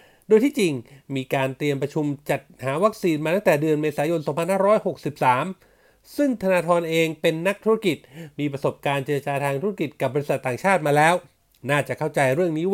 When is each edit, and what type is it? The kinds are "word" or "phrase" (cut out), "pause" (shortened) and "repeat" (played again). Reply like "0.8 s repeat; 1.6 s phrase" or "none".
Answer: none